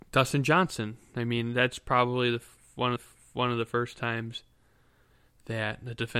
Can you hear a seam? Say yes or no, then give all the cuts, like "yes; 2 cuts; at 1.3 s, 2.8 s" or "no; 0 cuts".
yes; 1 cut; at 3.0 s